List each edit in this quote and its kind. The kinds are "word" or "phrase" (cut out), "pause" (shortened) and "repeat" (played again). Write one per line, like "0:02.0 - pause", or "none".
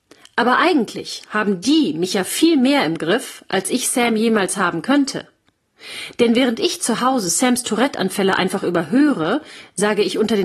none